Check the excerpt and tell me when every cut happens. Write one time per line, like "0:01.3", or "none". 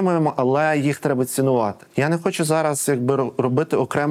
0:01.9

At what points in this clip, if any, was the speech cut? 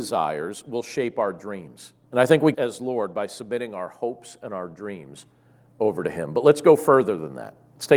0:02.0
0:02.5

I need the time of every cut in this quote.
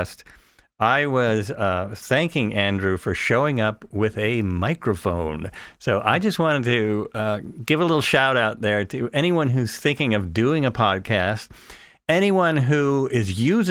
none

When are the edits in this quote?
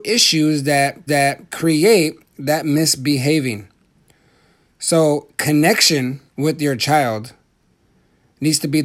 0:01.1
0:06.3

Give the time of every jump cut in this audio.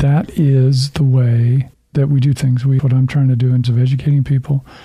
0:01.7
0:02.4
0:02.8
0:03.6

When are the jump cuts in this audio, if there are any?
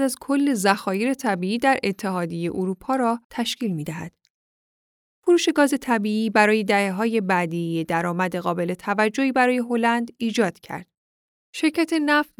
0:03.2

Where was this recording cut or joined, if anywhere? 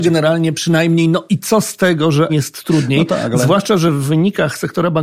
0:02.3

